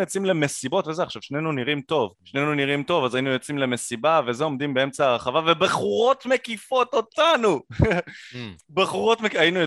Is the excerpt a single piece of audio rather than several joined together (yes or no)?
no